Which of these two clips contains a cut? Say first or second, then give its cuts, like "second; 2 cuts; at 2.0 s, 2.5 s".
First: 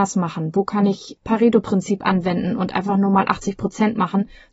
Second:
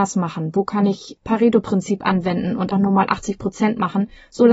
second; 1 cut; at 2.7 s